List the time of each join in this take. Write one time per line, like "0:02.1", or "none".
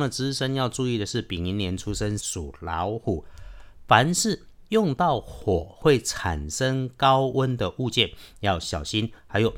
0:02.2